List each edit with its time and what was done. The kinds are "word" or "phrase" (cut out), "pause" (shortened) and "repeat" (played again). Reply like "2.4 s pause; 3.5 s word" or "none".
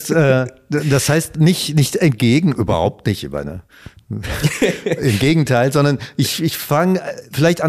none